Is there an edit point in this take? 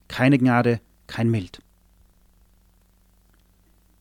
no; 0 cuts

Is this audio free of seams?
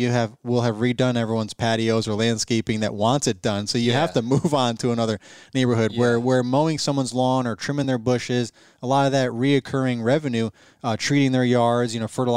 yes; 0 cuts

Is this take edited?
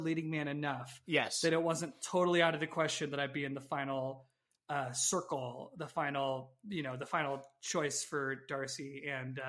no; 0 cuts

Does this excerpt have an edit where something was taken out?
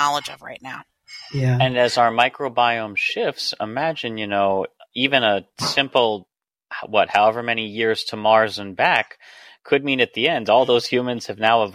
no; 0 cuts

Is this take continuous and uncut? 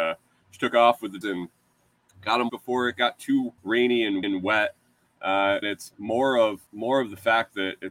no; 6 cuts; at 1.2 s, 2.5 s, 3.6 s, 4.2 s, 5.6 s, 6.7 s

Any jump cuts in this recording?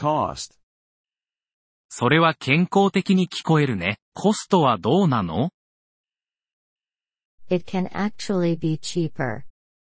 yes; 1 cut; at 4.0 s

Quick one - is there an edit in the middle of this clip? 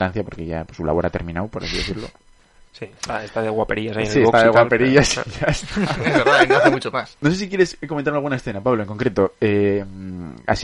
no; 0 cuts

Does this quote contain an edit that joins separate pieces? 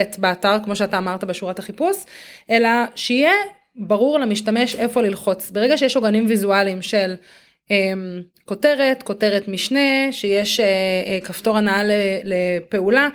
no; 0 cuts

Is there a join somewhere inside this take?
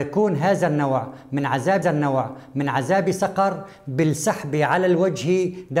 yes; 1 cut; at 1.8 s

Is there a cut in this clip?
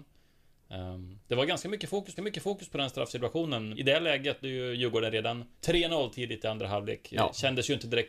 yes; 4 cuts; at 2.2 s, 3.7 s, 4.4 s, 5.5 s

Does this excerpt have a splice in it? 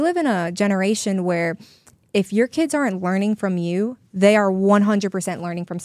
no; 0 cuts

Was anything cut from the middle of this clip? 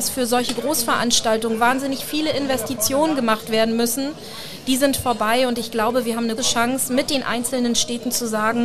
yes; 1 cut; at 6.4 s

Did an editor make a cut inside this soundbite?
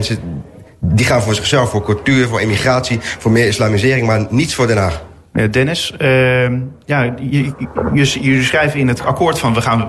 no; 0 cuts

